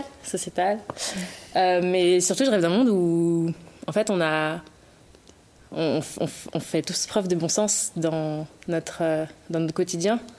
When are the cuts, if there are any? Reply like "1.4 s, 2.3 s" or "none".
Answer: none